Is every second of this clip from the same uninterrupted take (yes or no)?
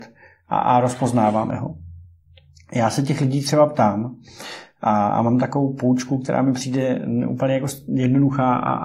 yes